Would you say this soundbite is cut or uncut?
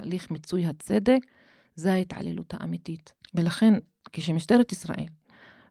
uncut